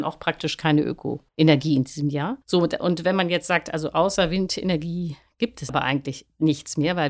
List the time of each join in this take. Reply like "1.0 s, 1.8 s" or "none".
1.3 s, 2.4 s, 5.7 s

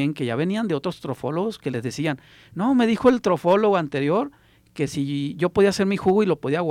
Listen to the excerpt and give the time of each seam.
none

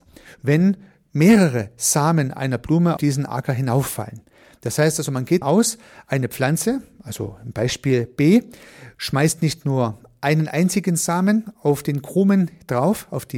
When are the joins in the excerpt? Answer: 3.0 s, 5.4 s

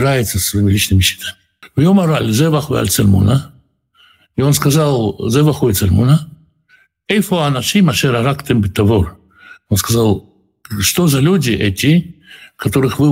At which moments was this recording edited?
none

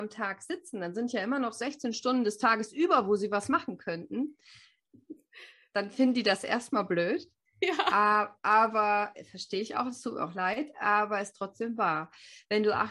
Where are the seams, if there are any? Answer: none

